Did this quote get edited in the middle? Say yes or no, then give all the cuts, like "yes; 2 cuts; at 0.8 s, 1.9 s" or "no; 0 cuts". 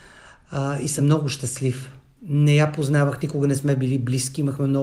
no; 0 cuts